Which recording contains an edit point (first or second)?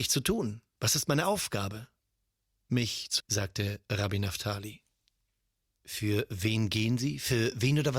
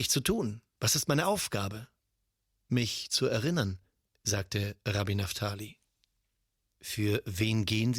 first